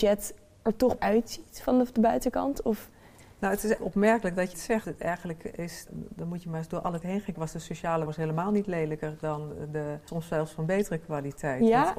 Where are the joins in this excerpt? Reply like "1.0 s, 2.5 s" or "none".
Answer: 1.0 s, 3.8 s, 4.5 s, 4.8 s, 5.9 s, 7.0 s, 7.3 s, 8.1 s, 10.1 s

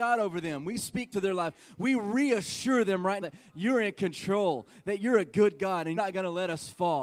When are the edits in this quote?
1.1 s, 3.2 s, 6.0 s

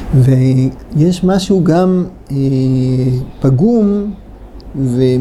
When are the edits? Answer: none

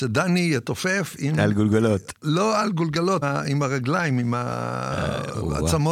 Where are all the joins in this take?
3.2 s

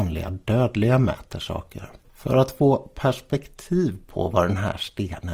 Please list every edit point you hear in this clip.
2.0 s

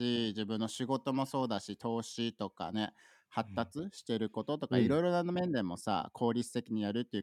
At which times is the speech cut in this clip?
none

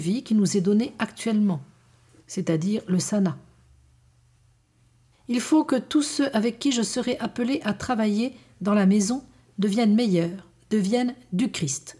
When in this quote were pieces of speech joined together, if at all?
none

